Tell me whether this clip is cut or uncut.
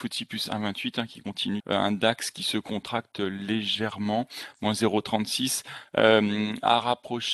cut